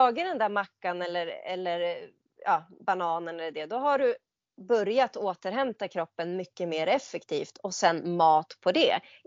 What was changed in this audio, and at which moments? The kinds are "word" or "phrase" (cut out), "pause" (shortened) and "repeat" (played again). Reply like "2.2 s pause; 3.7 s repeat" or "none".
none